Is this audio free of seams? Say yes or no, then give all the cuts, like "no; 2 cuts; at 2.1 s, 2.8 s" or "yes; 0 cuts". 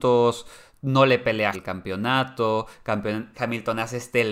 no; 2 cuts; at 1.5 s, 3.3 s